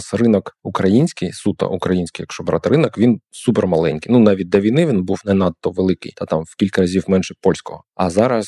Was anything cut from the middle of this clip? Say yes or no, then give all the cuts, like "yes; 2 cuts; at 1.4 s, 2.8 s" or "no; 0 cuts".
no; 0 cuts